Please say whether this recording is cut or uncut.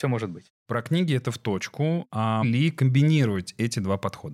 cut